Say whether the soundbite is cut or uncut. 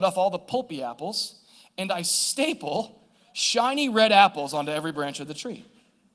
uncut